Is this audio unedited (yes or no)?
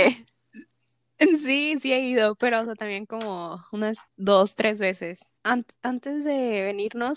no